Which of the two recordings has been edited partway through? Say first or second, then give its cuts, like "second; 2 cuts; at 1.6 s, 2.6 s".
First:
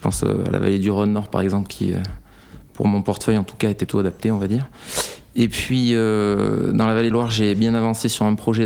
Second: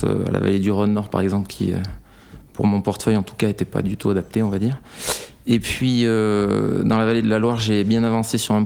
first; 2 cuts; at 3.9 s, 7.1 s